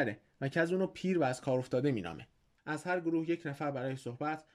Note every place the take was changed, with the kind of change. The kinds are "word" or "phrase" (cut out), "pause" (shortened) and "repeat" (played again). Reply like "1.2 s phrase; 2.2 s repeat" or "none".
none